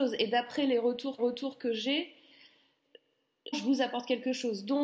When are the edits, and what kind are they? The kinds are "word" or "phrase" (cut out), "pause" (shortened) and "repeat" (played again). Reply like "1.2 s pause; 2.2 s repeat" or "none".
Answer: 1.2 s repeat; 3.5 s word